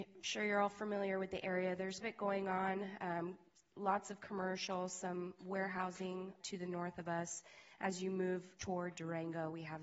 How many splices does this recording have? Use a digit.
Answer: 3